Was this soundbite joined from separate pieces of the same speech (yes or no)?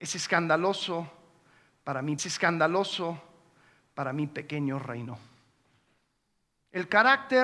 yes